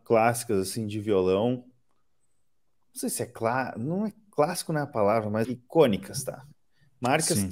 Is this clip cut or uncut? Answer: cut